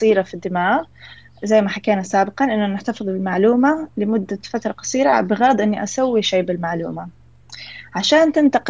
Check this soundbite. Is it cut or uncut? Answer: uncut